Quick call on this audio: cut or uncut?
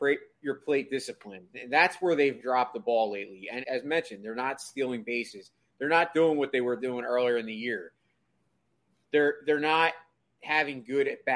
cut